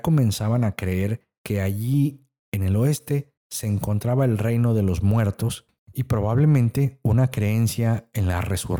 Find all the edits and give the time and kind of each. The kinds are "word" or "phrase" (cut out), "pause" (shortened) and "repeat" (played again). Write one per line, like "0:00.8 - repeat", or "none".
none